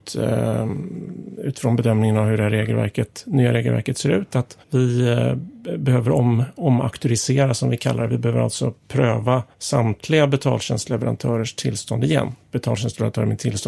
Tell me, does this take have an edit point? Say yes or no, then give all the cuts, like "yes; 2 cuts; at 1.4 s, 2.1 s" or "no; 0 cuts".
yes; 2 cuts; at 4.6 s, 9.5 s